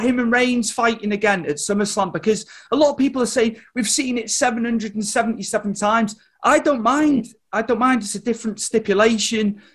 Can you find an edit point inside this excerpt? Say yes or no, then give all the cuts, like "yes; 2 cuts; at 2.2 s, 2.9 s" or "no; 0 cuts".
no; 0 cuts